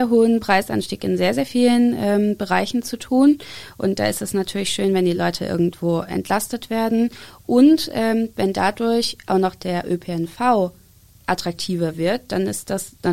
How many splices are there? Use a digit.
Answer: 0